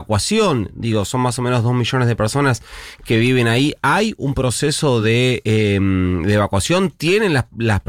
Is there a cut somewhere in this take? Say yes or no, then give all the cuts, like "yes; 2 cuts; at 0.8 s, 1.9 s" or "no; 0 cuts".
no; 0 cuts